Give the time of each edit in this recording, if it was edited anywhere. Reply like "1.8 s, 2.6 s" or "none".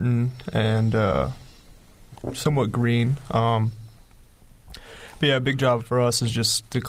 none